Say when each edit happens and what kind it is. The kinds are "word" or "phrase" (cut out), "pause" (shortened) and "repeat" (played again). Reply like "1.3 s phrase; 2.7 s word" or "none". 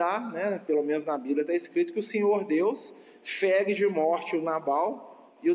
none